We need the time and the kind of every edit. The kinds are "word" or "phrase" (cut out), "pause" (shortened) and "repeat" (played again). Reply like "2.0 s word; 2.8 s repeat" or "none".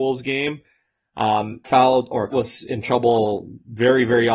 1.6 s word; 2.3 s word; 2.8 s word